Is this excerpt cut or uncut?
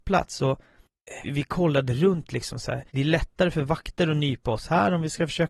cut